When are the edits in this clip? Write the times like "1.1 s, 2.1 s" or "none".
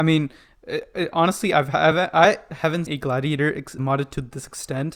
2.9 s, 3.8 s